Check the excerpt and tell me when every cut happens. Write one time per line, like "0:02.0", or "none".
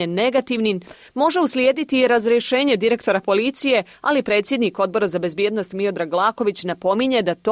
none